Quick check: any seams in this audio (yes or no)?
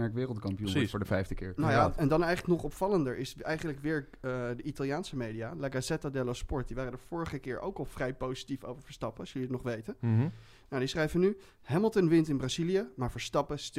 no